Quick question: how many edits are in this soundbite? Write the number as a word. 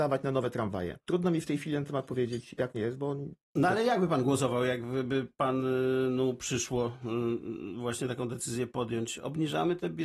three